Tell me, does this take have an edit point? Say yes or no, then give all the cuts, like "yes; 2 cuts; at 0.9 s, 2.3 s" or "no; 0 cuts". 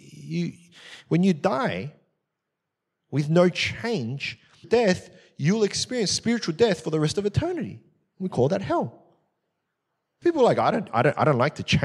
yes; 2 cuts; at 4.6 s, 10.2 s